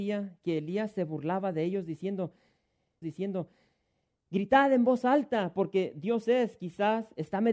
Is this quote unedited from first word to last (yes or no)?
no